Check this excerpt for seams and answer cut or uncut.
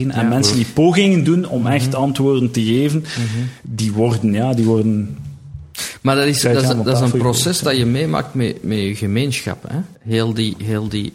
cut